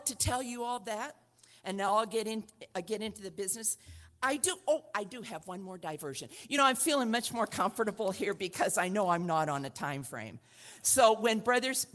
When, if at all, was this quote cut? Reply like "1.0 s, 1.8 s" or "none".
none